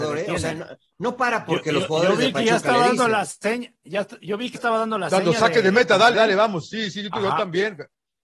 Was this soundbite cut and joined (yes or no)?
yes